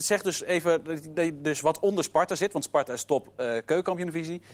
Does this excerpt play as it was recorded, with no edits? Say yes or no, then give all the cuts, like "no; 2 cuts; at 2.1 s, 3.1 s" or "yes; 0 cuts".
yes; 0 cuts